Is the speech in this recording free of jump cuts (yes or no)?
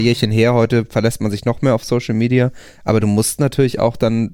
yes